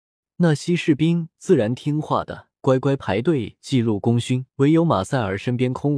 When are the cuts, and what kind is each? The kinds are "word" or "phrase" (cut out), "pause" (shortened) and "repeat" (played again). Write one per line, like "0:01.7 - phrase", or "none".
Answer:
0:02.6 - pause
0:04.5 - pause